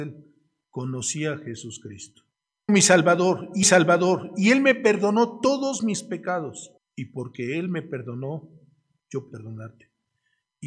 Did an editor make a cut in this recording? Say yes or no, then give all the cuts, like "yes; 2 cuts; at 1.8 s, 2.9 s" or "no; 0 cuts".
yes; 4 cuts; at 2.7 s, 3.6 s, 6.8 s, 9.3 s